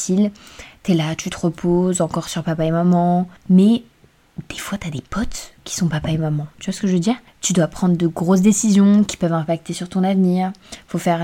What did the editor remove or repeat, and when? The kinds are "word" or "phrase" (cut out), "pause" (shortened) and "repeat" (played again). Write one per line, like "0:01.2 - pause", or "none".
0:03.4 - pause